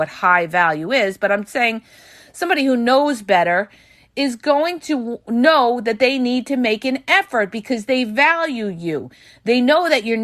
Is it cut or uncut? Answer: uncut